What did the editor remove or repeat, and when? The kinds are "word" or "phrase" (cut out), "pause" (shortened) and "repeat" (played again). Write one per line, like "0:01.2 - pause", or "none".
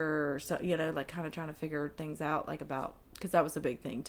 0:03.0 - pause